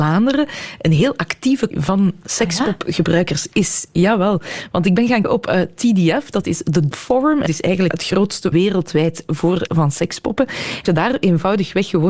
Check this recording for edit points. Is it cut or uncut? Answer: cut